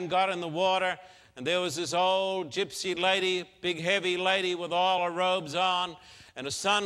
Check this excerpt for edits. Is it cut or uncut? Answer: uncut